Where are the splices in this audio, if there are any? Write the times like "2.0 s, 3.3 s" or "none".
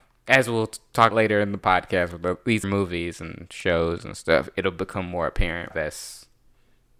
1.1 s, 2.6 s, 5.7 s